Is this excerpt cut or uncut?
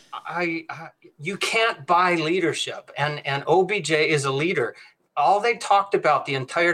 uncut